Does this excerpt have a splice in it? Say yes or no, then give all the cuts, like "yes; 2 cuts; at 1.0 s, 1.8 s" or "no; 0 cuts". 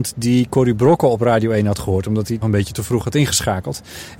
yes; 1 cut; at 2.4 s